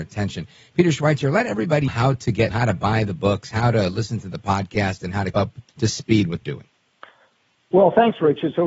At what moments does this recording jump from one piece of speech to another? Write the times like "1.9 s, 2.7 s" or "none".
1.9 s, 2.5 s, 5.3 s, 5.7 s, 6.4 s